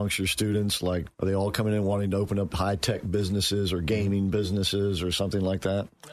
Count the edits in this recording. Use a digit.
1